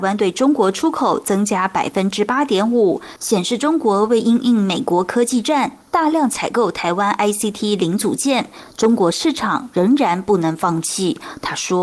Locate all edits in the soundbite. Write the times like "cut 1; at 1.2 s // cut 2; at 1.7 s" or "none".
none